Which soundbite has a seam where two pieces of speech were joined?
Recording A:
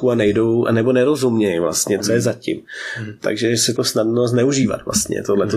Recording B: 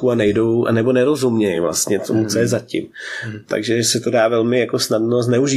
A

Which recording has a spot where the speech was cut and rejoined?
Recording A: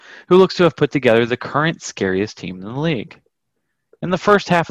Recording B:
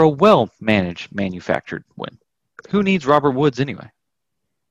B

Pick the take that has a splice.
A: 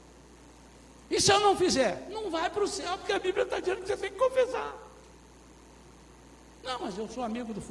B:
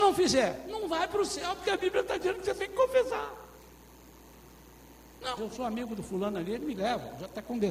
B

